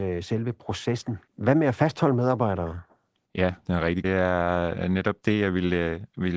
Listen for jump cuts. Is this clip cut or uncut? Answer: cut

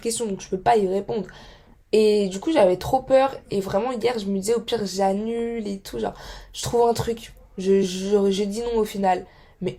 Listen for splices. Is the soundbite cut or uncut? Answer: uncut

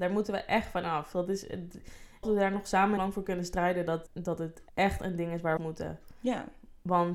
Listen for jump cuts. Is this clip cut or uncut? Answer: cut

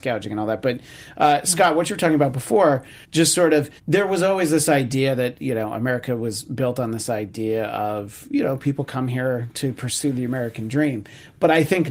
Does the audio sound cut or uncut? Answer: cut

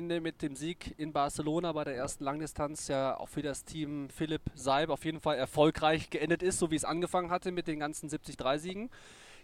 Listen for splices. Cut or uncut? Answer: uncut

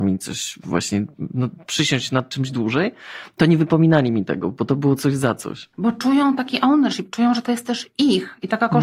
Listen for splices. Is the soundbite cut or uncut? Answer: cut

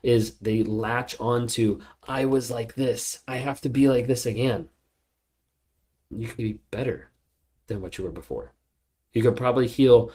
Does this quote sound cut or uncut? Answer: cut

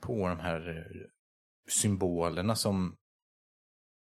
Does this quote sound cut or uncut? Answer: uncut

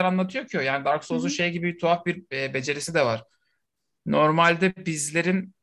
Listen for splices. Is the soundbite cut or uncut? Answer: uncut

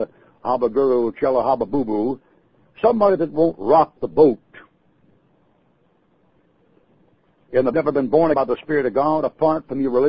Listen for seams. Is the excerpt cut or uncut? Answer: cut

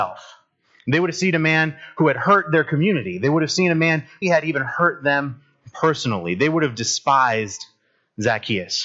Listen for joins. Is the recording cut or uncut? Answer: cut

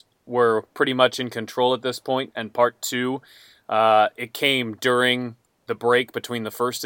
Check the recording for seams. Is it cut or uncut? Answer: uncut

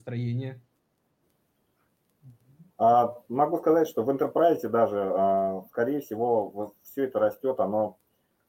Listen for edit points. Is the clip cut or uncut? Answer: cut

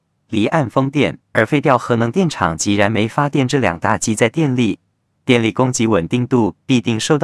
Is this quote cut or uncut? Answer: cut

